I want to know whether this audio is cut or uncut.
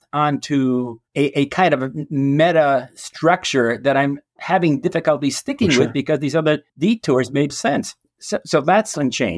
cut